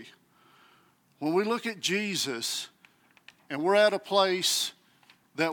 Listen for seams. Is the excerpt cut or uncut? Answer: uncut